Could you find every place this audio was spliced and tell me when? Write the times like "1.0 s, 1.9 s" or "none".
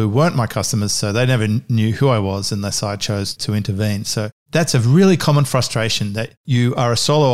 none